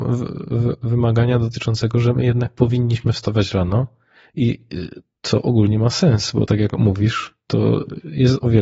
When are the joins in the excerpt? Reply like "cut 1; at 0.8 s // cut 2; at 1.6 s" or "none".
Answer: none